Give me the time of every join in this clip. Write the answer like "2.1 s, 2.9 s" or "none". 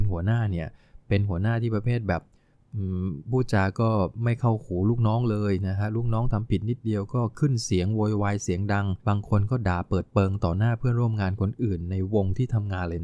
9.0 s